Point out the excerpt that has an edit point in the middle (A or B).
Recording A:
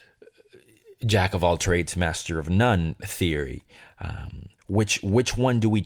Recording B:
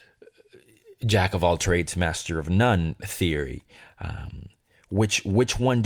A